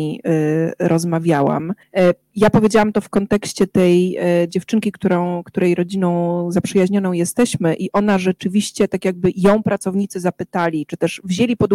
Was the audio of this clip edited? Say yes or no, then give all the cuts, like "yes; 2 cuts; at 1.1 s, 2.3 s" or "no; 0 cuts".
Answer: yes; 1 cut; at 1.8 s